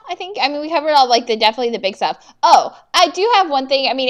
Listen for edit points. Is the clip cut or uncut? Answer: uncut